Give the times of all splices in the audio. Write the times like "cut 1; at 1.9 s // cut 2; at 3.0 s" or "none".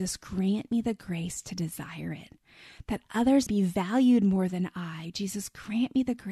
cut 1; at 3.5 s